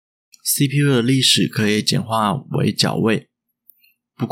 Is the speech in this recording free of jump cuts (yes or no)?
yes